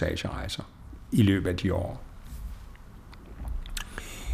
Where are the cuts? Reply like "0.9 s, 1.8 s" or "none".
none